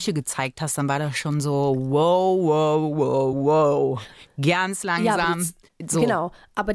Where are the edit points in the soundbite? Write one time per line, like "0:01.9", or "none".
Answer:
none